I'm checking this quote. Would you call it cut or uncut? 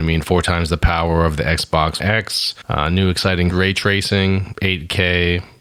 cut